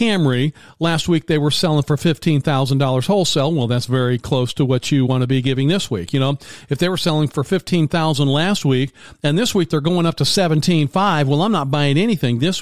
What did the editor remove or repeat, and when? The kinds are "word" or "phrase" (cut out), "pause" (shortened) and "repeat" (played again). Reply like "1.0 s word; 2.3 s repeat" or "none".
none